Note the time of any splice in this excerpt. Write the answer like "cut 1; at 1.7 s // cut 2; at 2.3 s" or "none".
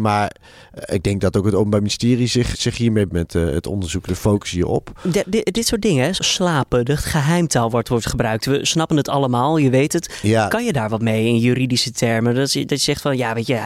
cut 1; at 2.5 s // cut 2; at 3.1 s // cut 3; at 6.2 s